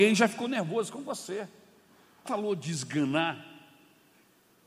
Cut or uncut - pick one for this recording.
cut